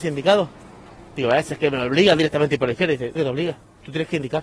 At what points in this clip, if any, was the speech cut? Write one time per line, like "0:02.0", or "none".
0:01.1
0:03.1